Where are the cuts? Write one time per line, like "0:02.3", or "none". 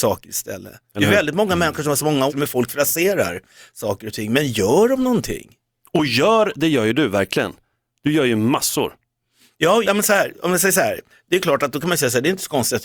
0:02.3
0:09.8